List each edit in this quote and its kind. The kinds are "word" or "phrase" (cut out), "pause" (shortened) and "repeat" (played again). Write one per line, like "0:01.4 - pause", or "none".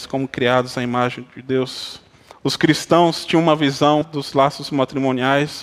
0:02.3 - pause
0:04.0 - word